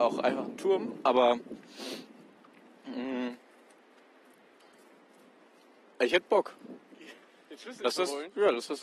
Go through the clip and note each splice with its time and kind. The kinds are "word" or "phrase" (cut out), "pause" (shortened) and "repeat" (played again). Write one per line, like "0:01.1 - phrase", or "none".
none